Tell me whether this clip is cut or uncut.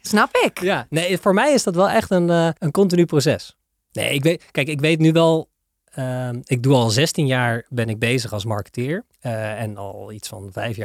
cut